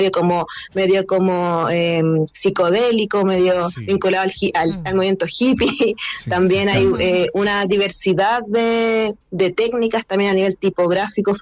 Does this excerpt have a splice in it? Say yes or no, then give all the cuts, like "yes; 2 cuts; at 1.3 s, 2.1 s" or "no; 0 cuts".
yes; 1 cut; at 9.2 s